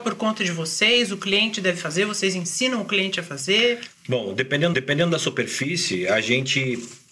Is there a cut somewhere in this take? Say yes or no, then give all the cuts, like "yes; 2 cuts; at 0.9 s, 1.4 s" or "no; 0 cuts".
yes; 1 cut; at 4.7 s